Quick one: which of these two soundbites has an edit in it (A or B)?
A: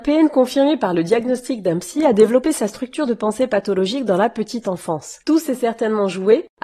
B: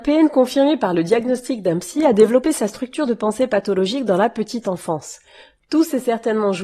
A